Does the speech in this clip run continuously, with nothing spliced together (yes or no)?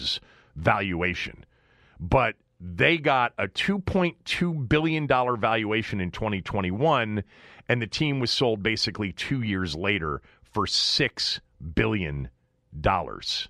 yes